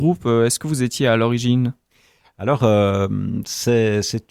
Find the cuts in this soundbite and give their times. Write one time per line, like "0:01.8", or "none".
none